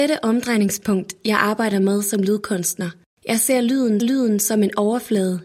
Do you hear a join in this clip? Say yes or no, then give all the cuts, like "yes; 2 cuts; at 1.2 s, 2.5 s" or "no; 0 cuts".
yes; 1 cut; at 4.0 s